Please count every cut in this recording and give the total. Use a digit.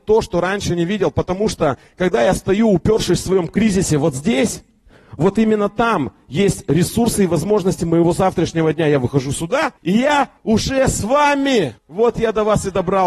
3